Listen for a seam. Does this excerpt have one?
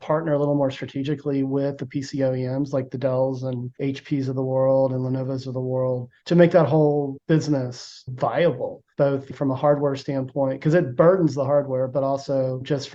yes; 3 cuts; at 3.7 s, 6.2 s, 8.9 s

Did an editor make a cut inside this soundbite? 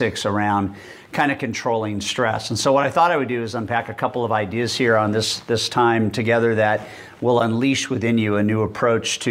no; 0 cuts

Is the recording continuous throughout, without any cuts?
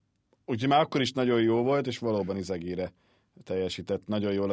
yes; 0 cuts

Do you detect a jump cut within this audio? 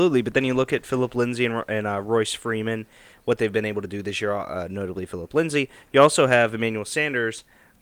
no; 0 cuts

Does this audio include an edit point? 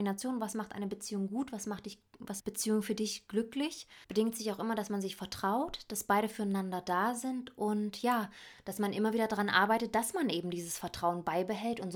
yes; 2 cuts; at 2.4 s, 4.0 s

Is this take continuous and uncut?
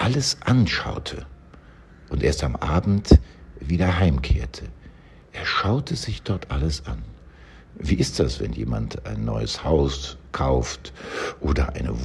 yes; 0 cuts

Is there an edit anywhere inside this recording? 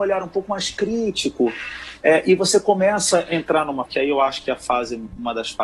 yes; 1 cut; at 3.9 s

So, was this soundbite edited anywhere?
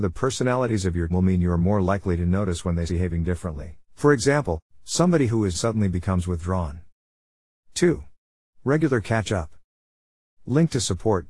yes; 4 cuts; at 1.1 s, 2.9 s, 3.8 s, 5.5 s

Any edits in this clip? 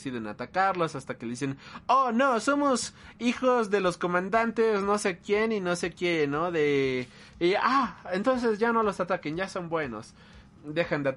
no; 0 cuts

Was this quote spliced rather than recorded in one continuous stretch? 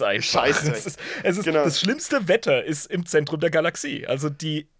no; 0 cuts

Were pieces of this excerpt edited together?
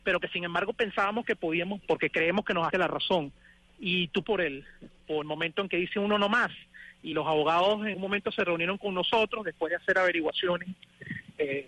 yes; 6 cuts; at 1.8 s, 2.7 s, 4.2 s, 5.2 s, 7.1 s, 7.9 s

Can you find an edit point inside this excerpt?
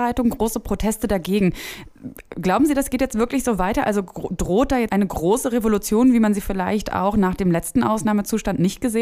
yes; 1 cut; at 4.9 s

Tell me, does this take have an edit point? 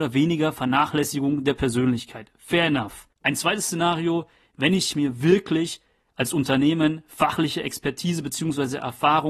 yes; 1 cut; at 3.1 s

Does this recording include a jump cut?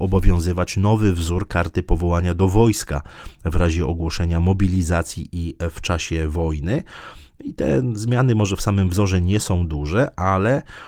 no; 0 cuts

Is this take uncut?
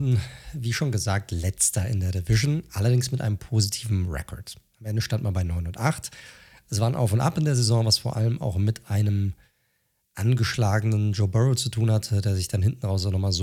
yes; 0 cuts

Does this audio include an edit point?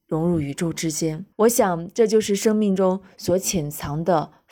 yes; 1 cut; at 1.3 s

